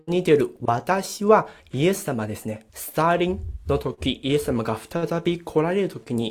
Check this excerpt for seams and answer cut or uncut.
cut